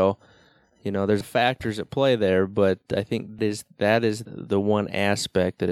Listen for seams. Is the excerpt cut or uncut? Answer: cut